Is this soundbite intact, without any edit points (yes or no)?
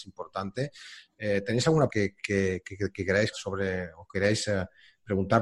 no